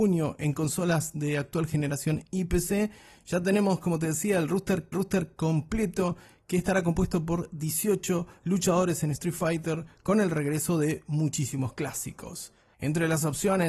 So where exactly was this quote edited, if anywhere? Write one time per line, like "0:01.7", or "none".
0:04.9